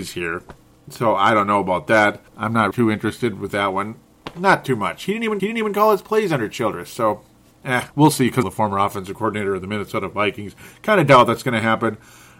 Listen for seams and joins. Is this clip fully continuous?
no; 5 cuts; at 2.3 s, 2.7 s, 5.4 s, 7.9 s, 8.4 s

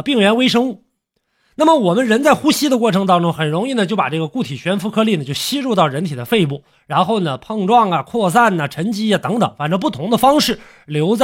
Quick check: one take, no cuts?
yes; 0 cuts

